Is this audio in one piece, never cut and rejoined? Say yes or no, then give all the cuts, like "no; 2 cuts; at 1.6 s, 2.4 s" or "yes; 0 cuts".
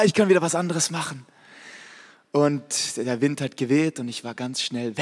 yes; 0 cuts